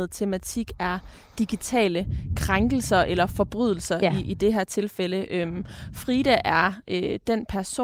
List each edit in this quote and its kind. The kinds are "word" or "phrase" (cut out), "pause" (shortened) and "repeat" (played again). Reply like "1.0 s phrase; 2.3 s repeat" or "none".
none